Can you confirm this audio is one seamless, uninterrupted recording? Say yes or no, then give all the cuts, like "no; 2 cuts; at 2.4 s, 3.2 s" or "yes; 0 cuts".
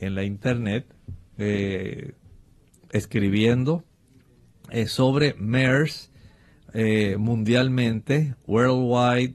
yes; 0 cuts